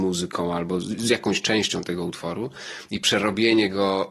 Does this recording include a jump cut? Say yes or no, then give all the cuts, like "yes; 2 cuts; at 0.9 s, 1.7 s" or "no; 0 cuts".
no; 0 cuts